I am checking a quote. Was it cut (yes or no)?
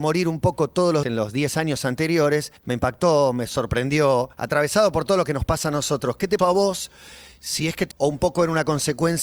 yes